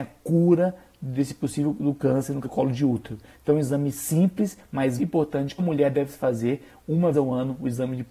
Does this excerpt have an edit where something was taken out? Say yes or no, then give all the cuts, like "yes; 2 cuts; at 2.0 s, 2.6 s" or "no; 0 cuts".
yes; 4 cuts; at 2.4 s, 5.0 s, 5.6 s, 7.1 s